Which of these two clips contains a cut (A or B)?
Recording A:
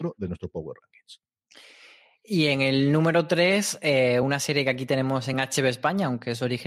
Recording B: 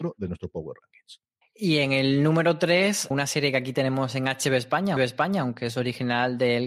B